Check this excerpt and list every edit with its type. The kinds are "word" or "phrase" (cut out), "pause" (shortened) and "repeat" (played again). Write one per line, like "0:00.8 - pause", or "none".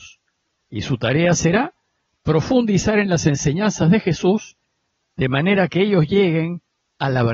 none